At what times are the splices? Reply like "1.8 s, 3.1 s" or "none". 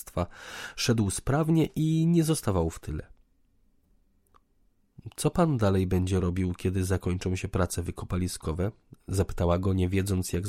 none